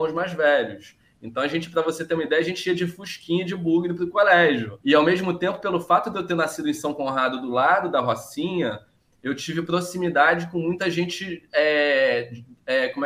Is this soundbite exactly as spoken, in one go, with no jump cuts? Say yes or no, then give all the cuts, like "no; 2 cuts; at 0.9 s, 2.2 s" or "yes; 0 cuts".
yes; 0 cuts